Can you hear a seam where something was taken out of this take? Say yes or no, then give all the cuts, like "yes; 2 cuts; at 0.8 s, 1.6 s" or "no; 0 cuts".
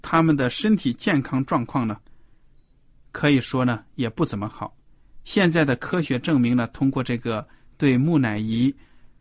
no; 0 cuts